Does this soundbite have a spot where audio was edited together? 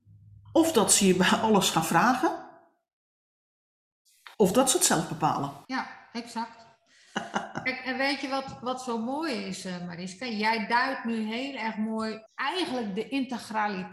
yes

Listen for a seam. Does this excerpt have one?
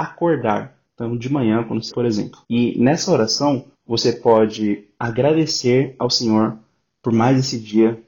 yes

